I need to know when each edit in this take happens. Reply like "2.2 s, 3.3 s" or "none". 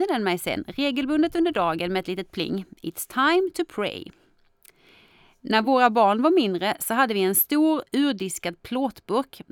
none